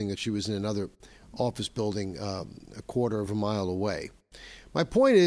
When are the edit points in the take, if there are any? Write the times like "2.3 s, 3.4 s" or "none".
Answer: none